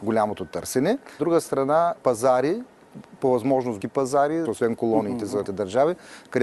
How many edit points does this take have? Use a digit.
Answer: 5